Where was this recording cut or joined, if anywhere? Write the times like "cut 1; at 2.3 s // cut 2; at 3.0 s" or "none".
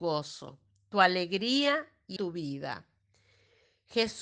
cut 1; at 2.2 s

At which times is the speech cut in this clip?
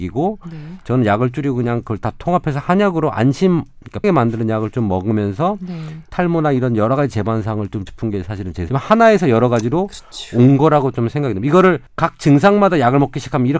cut 1; at 4.0 s // cut 2; at 7.9 s // cut 3; at 8.7 s // cut 4; at 11.9 s

